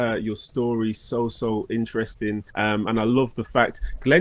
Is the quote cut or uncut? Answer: cut